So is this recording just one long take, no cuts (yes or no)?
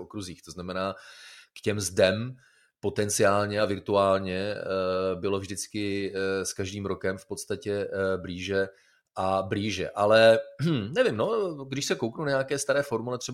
yes